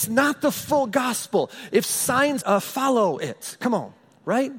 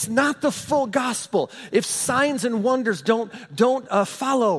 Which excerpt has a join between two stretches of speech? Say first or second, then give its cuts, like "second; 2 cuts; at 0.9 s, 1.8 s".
first; 1 cut; at 2.4 s